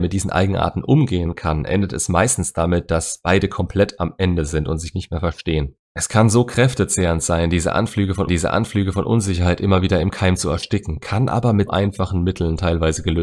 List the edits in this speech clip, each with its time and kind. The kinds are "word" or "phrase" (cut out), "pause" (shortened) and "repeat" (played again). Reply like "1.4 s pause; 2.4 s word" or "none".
4.9 s word; 8.3 s repeat; 11.7 s word